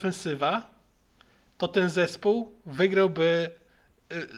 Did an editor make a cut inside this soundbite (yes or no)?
no